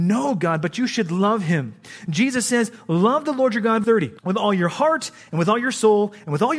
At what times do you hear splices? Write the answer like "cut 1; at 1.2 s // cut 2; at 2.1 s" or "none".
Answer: cut 1; at 3.8 s // cut 2; at 4.2 s